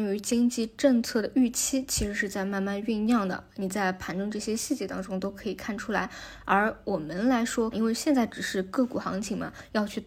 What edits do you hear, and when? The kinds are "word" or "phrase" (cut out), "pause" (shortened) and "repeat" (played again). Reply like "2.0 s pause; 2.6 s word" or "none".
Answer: 7.7 s phrase